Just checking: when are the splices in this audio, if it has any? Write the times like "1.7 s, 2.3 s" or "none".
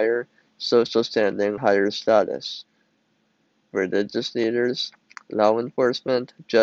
1.6 s, 3.7 s